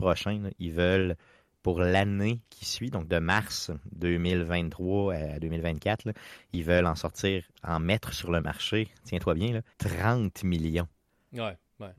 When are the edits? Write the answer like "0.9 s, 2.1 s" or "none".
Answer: 9.7 s

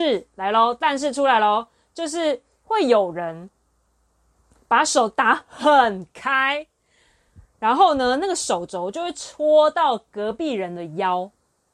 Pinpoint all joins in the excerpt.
none

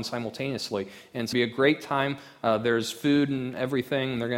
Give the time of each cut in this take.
1.3 s

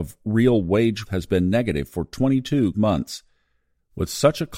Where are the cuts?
1.1 s, 2.7 s

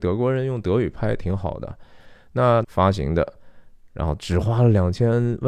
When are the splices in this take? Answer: 2.6 s

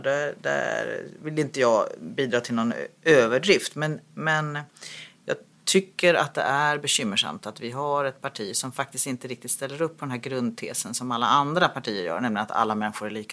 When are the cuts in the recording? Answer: none

